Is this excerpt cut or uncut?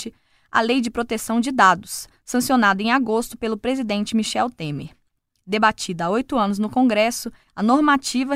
uncut